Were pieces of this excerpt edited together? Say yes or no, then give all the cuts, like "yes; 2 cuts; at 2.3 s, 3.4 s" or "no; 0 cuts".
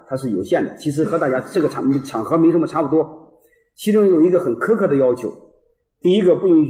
no; 0 cuts